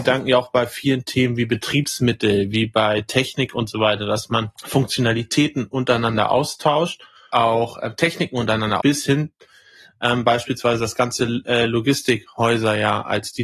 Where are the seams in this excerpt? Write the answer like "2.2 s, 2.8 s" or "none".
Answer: 4.5 s, 7.3 s, 8.8 s